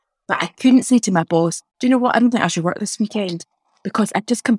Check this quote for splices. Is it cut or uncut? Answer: uncut